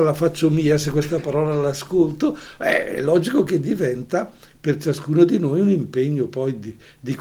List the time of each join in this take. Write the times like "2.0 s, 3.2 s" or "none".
none